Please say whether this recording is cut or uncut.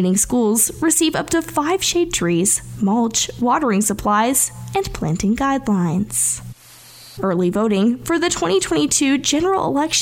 uncut